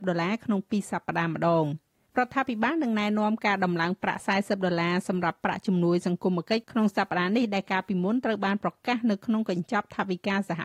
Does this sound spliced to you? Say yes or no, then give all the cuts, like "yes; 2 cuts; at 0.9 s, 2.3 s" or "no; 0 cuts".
yes; 1 cut; at 2.0 s